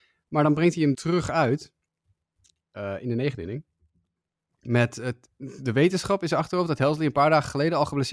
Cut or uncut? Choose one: cut